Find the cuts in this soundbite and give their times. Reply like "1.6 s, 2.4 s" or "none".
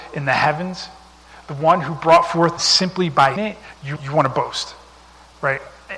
2.6 s, 3.4 s, 4.0 s